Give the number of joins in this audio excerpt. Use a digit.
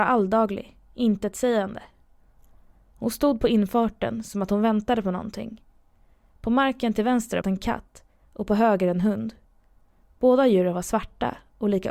1